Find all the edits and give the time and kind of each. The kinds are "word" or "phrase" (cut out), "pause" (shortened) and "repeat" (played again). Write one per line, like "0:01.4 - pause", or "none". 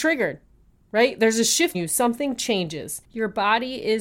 0:01.7 - word
0:03.0 - pause